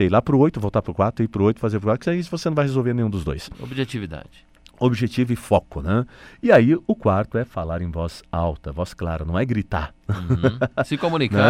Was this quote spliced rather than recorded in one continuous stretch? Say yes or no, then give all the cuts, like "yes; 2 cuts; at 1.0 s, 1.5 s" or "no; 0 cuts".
no; 0 cuts